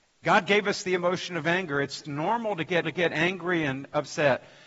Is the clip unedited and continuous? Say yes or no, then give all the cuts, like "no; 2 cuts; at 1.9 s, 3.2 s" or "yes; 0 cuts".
no; 2 cuts; at 2.0 s, 2.8 s